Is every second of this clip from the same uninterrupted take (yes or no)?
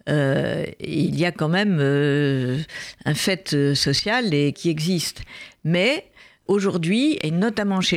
no